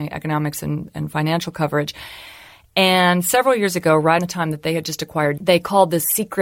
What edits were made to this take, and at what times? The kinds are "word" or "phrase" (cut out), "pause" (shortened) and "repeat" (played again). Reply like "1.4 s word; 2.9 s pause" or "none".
4.2 s word; 5.4 s word